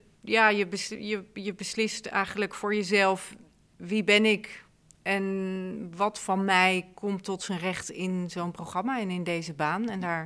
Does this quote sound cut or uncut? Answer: uncut